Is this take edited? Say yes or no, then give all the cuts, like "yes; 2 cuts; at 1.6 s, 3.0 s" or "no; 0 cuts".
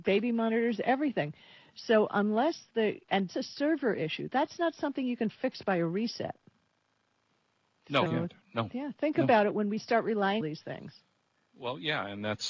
yes; 3 cuts; at 3.3 s, 8.1 s, 10.4 s